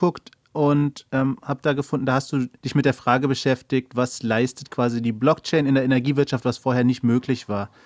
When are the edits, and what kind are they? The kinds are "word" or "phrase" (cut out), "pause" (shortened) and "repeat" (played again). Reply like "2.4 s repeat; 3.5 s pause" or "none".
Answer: 2.6 s pause